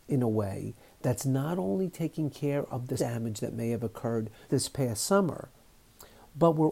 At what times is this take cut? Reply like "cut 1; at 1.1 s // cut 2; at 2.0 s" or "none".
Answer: cut 1; at 3.0 s // cut 2; at 4.5 s